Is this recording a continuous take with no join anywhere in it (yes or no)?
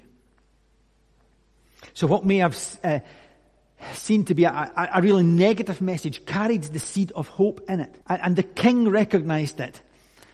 no